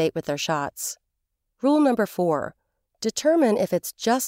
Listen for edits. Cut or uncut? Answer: uncut